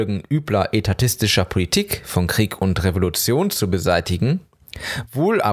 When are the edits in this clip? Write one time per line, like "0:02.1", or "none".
none